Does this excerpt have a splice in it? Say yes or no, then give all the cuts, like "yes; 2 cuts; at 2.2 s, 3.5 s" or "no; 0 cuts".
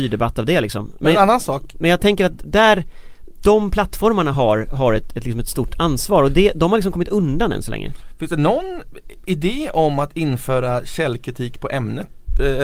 no; 0 cuts